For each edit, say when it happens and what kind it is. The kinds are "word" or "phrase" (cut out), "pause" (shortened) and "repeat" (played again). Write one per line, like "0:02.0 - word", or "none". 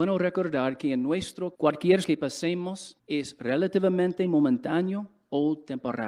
0:01.5 - word
0:02.0 - word
0:03.0 - pause